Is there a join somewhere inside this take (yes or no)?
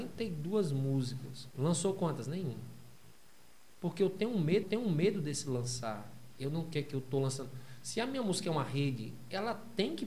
yes